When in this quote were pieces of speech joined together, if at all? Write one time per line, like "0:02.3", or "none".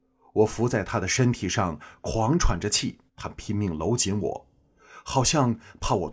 0:03.1